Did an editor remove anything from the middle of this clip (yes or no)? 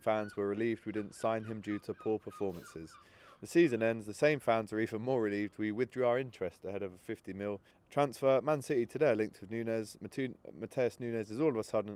yes